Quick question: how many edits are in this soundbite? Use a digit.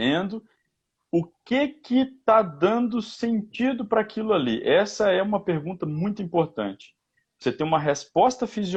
0